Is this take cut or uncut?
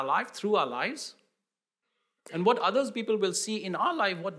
uncut